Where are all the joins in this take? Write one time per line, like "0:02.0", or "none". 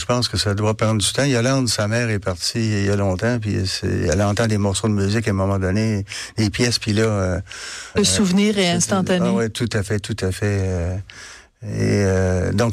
0:07.9